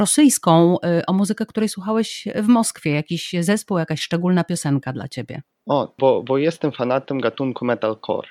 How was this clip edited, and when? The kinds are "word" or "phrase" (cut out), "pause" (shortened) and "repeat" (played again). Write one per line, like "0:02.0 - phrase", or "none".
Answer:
none